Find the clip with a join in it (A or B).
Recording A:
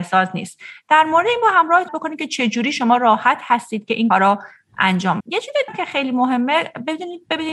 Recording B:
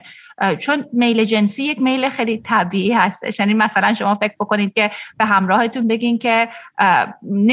A